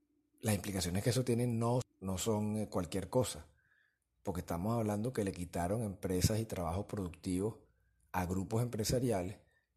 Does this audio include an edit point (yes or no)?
yes